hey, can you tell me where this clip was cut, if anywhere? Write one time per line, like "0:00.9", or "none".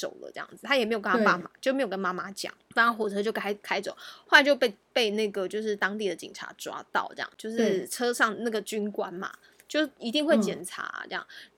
none